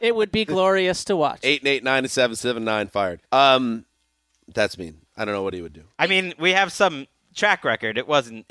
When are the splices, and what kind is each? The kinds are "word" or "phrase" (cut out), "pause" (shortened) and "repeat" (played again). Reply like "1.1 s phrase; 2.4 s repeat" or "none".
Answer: 3.2 s pause; 5.1 s pause